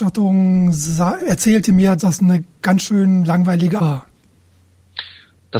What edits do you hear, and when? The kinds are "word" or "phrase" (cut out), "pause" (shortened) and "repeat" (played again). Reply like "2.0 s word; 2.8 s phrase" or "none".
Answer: 1.2 s word; 2.0 s word; 3.8 s word

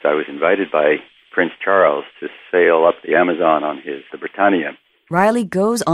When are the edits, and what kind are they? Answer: 4.1 s word

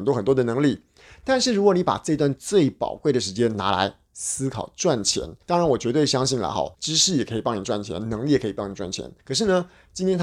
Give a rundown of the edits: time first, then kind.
5.4 s pause; 6.7 s pause; 9.2 s pause

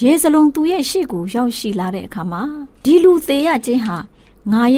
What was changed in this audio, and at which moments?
2.7 s pause

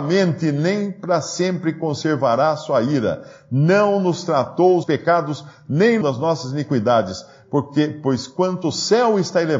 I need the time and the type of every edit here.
4.8 s phrase; 6.0 s phrase

